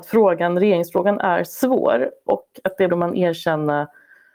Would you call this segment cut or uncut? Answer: cut